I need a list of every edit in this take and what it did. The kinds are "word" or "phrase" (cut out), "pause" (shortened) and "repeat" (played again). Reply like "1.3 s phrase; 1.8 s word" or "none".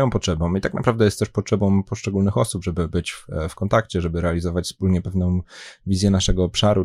none